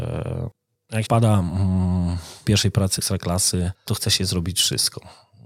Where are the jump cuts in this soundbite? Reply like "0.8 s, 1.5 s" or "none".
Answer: 1.0 s, 2.4 s, 3.0 s, 3.9 s